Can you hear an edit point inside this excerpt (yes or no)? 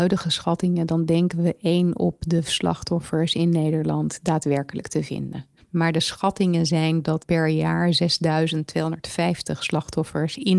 yes